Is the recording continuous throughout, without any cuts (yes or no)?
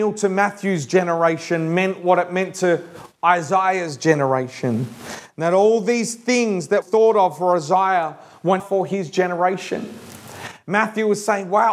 no